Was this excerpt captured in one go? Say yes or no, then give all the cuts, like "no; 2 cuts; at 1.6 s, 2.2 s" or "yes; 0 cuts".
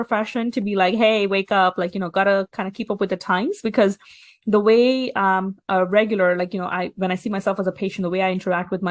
yes; 0 cuts